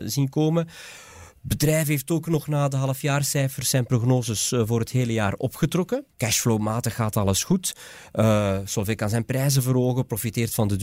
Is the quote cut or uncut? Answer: cut